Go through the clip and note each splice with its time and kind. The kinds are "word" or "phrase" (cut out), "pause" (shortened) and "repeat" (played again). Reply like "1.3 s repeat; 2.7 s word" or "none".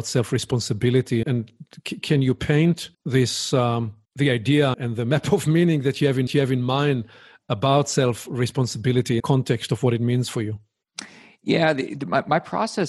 1.2 s word; 2.9 s pause; 4.0 s pause; 4.7 s word; 6.3 s repeat; 9.2 s phrase

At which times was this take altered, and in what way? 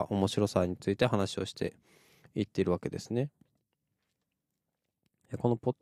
none

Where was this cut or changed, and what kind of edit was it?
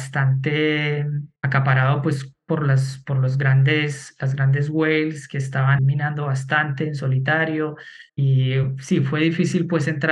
1.4 s pause; 5.8 s word; 8.1 s pause

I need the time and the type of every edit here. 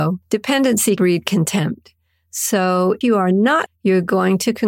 1.0 s word; 3.0 s word; 3.7 s word

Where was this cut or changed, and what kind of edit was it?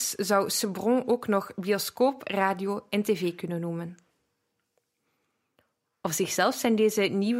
none

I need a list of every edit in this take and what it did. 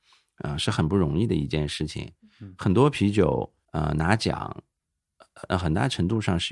none

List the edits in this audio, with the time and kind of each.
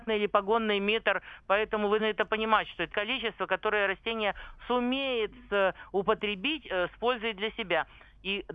2.0 s word; 2.9 s word

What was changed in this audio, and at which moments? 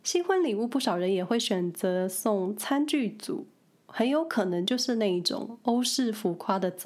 none

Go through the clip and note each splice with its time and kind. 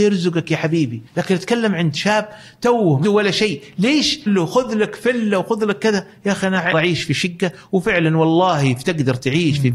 1.1 s pause; 3.0 s word; 4.3 s phrase; 6.7 s word

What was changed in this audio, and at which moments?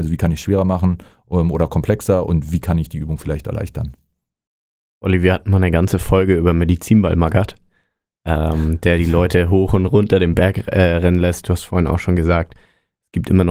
none

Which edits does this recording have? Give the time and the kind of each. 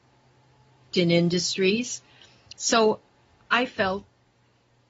0.9 s word

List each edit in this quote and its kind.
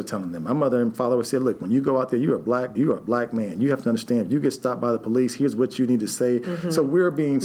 2.7 s word

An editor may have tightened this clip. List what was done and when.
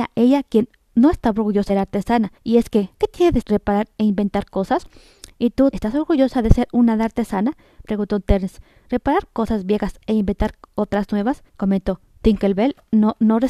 1.7 s phrase; 2.4 s pause; 3.4 s word; 5.7 s word; 11.5 s pause

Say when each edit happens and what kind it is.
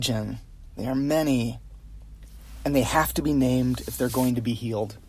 none

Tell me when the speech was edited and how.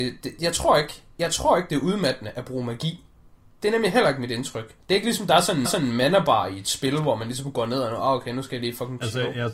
4.8 s pause; 5.7 s repeat

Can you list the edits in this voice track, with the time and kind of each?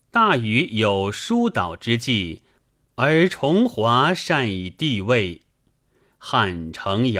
none

